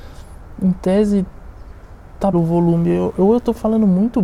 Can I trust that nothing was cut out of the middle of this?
no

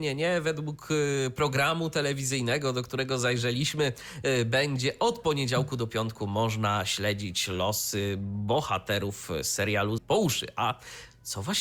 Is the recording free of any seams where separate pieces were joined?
no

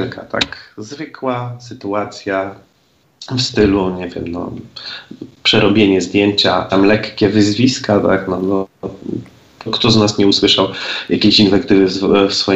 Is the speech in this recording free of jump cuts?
no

